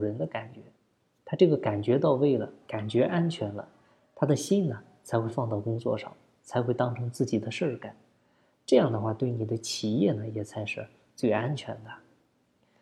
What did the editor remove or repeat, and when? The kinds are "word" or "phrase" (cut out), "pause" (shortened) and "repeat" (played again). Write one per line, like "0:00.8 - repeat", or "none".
none